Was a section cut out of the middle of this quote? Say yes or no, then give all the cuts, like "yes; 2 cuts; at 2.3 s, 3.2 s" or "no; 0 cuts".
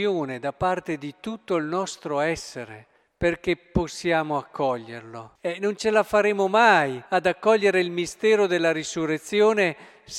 yes; 3 cuts; at 3.0 s, 5.4 s, 7.1 s